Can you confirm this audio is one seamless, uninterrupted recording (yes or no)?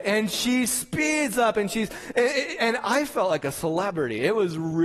yes